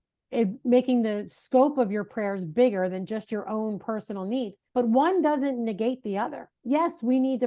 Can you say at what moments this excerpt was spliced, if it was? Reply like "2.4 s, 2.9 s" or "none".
4.7 s, 6.6 s